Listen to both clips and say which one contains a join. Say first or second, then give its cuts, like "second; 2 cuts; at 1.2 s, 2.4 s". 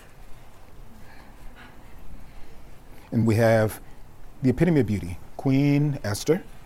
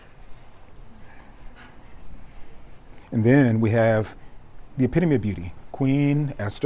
first; 1 cut; at 3.2 s